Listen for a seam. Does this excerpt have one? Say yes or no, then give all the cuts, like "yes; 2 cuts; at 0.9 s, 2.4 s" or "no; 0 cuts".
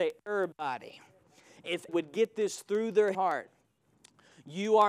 yes; 2 cuts; at 1.9 s, 3.1 s